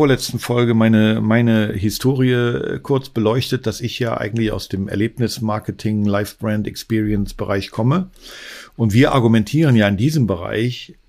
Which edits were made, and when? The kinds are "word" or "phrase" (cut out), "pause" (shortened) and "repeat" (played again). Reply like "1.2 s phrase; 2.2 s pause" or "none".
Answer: none